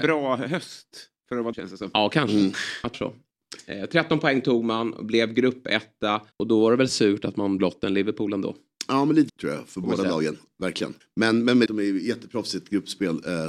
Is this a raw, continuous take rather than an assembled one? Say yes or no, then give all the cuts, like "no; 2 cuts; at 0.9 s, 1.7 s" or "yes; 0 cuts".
no; 7 cuts; at 1.5 s, 2.9 s, 6.3 s, 7.6 s, 9.3 s, 11.0 s, 11.7 s